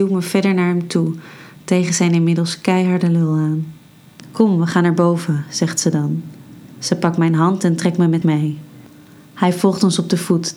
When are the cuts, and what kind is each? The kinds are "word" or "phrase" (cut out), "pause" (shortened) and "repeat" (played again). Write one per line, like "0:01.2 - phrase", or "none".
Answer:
0:08.2 - word